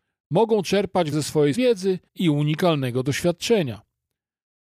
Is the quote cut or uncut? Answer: cut